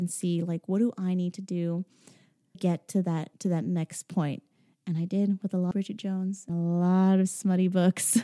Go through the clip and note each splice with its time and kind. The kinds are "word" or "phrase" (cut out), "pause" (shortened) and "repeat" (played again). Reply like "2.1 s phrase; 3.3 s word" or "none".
2.5 s word; 3.3 s pause; 5.7 s word; 6.5 s word